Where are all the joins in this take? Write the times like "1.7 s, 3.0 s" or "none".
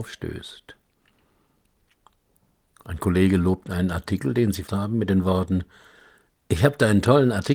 4.7 s